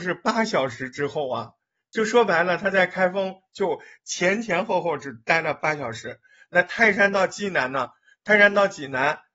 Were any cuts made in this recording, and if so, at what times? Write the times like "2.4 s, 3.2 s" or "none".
none